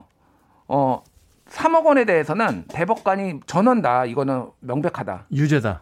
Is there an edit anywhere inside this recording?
no; 0 cuts

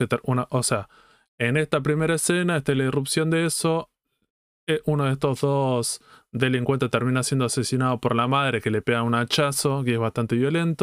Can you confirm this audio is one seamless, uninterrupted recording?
yes; 0 cuts

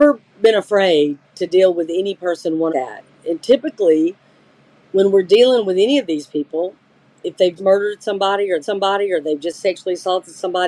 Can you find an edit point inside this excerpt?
yes; 3 cuts; at 2.7 s, 7.6 s, 8.6 s

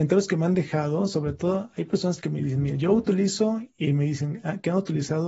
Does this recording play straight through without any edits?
yes; 0 cuts

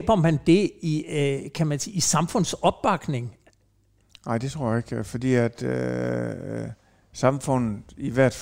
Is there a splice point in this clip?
no; 0 cuts

